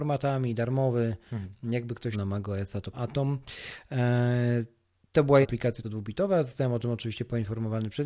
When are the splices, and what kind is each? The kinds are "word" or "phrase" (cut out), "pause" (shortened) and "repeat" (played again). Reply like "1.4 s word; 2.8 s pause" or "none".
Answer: 2.1 s word; 2.9 s word; 5.4 s word; 5.8 s word